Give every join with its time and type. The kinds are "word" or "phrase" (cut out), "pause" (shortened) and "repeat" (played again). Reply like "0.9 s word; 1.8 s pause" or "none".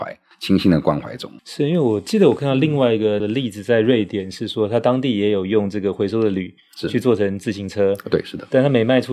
1.4 s pause; 3.2 s word